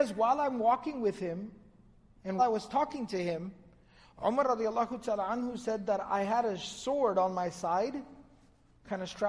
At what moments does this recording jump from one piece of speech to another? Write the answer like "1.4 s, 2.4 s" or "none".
2.4 s